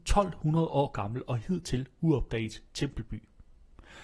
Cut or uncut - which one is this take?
uncut